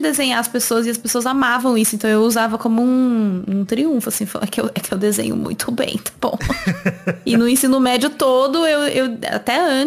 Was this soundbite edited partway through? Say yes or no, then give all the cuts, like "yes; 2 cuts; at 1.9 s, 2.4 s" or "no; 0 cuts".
no; 0 cuts